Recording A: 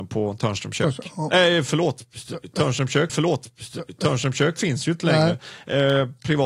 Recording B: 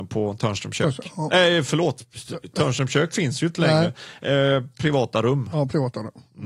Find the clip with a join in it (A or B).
A